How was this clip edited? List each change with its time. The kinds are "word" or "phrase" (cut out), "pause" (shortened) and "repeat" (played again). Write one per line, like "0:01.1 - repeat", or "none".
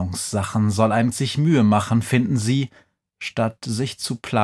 0:01.1 - word